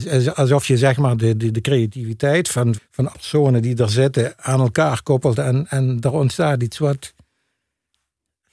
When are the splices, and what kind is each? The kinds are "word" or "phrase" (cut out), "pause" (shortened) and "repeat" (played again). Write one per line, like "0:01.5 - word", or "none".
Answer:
0:02.7 - word
0:03.1 - word